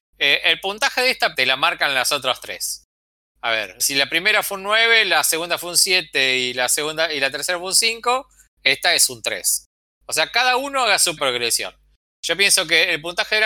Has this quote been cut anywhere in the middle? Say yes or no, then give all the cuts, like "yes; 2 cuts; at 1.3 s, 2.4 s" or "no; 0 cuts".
yes; 3 cuts; at 1.3 s, 3.8 s, 11.2 s